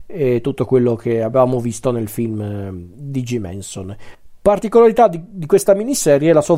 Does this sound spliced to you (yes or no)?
no